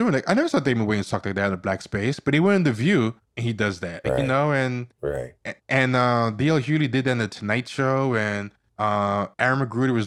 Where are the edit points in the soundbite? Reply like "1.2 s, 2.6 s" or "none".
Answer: 4.0 s